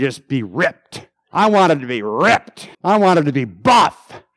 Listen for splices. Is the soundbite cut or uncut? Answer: cut